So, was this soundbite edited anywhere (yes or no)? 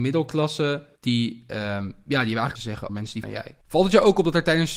yes